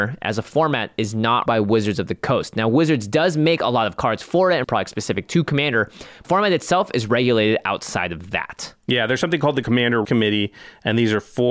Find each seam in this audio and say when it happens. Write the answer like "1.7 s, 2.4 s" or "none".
1.5 s, 4.6 s, 6.2 s, 10.0 s